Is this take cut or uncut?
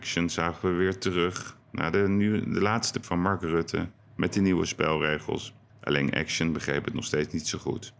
cut